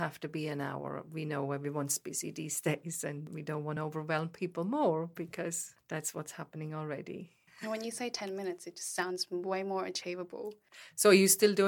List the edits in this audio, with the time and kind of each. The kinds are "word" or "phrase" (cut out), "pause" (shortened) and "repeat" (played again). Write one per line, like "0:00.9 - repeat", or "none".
none